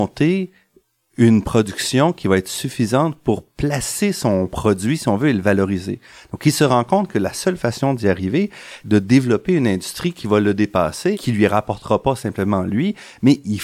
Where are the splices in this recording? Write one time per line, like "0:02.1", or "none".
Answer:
0:08.8
0:11.1